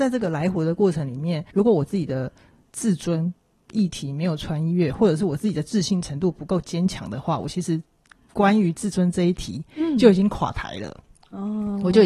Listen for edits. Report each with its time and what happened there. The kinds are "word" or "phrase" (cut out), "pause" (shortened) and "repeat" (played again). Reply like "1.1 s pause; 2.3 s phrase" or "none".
1.5 s pause